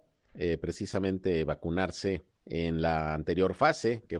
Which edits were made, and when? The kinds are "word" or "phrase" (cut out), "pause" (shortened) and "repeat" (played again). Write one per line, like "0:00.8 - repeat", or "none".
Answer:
0:02.4 - pause